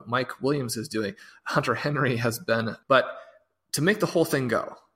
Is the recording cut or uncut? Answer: cut